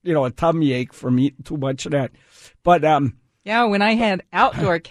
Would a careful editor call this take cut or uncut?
uncut